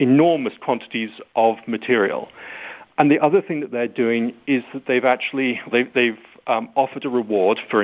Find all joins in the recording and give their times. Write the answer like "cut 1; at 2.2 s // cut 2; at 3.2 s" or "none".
cut 1; at 5.7 s